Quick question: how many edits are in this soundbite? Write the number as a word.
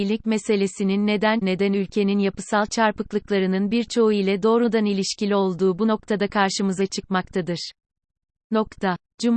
one